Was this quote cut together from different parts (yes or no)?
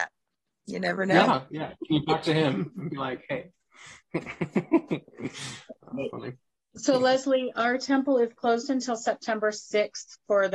no